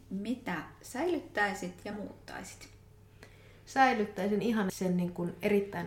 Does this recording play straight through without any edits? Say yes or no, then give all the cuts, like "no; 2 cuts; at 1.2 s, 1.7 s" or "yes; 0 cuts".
no; 2 cuts; at 1.9 s, 4.7 s